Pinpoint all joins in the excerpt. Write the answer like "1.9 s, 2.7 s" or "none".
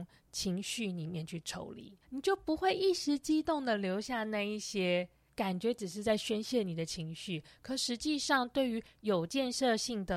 2.0 s, 5.3 s